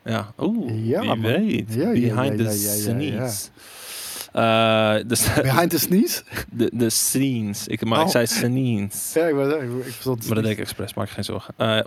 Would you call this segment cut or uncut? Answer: uncut